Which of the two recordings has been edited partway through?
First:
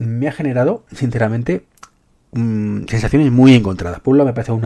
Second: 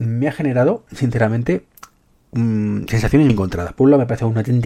second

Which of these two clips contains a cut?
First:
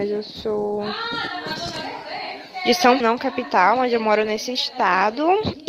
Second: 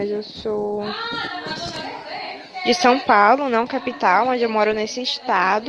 first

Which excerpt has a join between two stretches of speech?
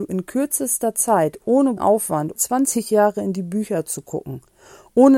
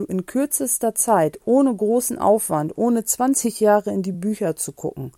first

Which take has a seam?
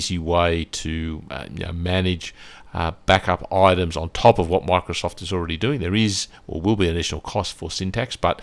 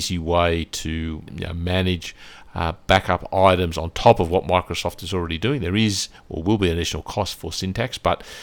second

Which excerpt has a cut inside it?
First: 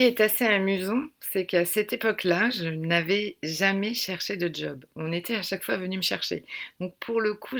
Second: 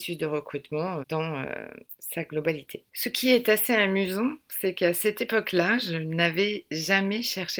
second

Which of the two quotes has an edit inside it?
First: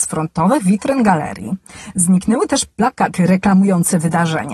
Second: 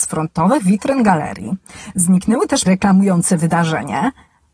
second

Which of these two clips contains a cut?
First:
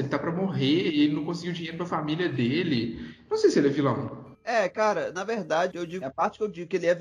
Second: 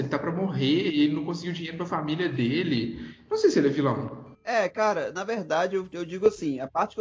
first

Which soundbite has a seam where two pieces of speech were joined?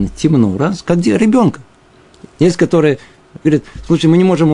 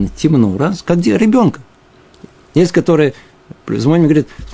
first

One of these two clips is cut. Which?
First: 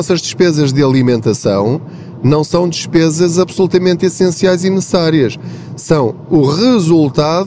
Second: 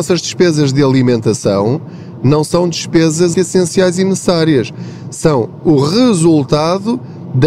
second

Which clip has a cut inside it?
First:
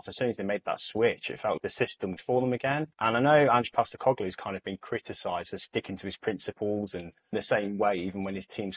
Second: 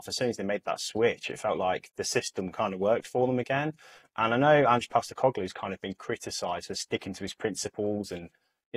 first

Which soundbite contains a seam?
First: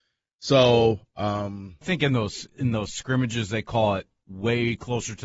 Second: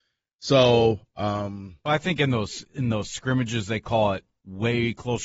first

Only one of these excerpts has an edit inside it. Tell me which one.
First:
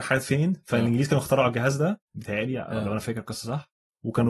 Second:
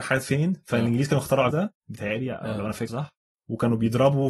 second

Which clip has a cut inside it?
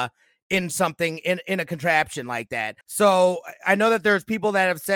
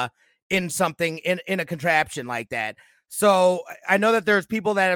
first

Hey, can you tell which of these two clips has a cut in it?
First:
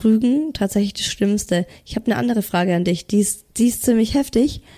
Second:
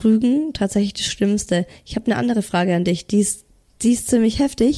first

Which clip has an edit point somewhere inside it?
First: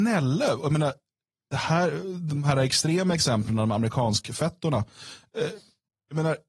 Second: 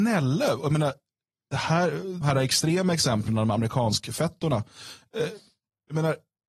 second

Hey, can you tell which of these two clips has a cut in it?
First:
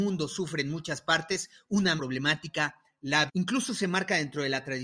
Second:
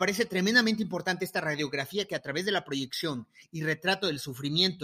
first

